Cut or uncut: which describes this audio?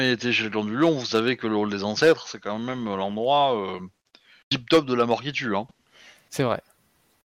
uncut